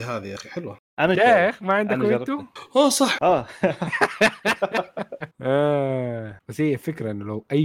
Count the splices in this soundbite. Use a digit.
3